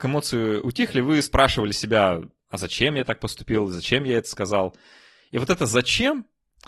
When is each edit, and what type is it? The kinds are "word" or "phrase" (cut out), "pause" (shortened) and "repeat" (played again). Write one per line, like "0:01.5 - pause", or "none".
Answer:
none